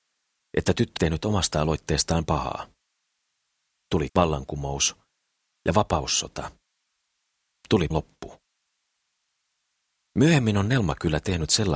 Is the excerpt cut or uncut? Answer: cut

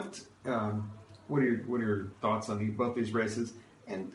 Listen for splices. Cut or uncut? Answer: uncut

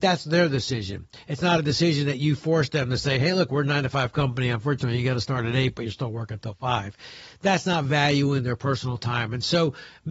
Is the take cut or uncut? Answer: uncut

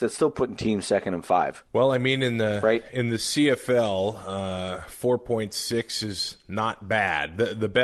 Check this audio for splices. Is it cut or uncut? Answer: cut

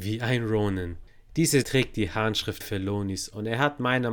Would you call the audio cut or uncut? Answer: cut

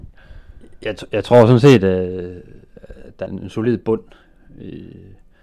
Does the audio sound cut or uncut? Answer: cut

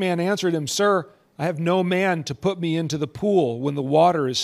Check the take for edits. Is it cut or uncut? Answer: uncut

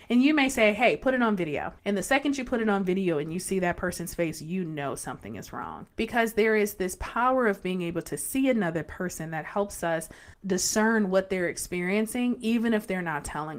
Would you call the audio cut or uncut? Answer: cut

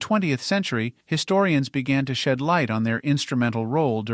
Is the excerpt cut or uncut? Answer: cut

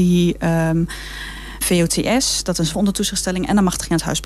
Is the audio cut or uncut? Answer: cut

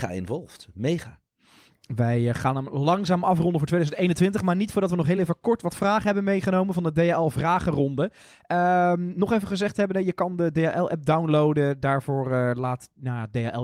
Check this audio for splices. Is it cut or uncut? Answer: uncut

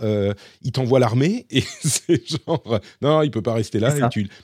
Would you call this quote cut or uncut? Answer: uncut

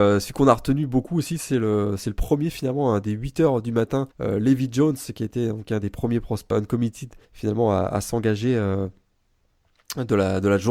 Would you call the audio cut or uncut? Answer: cut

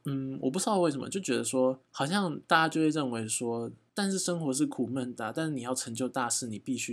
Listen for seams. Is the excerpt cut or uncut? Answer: cut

